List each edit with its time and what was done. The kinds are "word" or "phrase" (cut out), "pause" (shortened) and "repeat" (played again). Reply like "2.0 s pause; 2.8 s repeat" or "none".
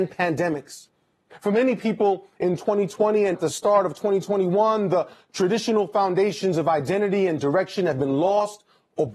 3.3 s word

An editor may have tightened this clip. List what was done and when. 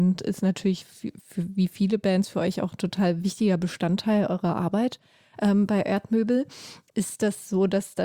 none

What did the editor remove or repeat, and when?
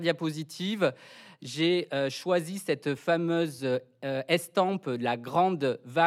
none

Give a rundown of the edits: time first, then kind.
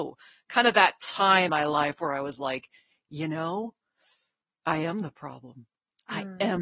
1.5 s word

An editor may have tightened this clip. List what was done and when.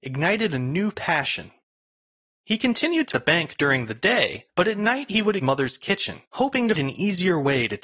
3.1 s phrase; 4.5 s pause; 5.4 s phrase; 6.3 s pause; 6.8 s word

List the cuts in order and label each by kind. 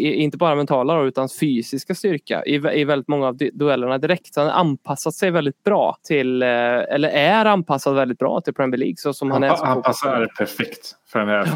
6.0 s pause

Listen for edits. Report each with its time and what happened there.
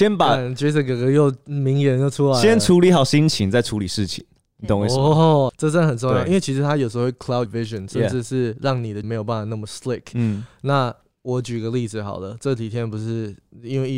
5.5 s word; 7.5 s word; 9.0 s word

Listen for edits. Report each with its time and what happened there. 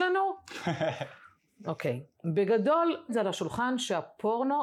3.1 s word

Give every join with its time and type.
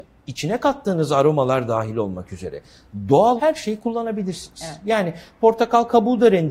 3.4 s word

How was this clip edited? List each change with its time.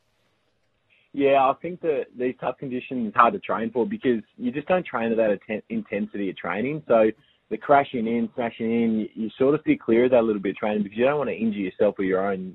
2.1 s word; 3.2 s word

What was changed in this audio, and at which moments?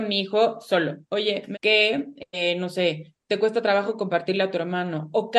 1.0 s pause; 1.5 s phrase

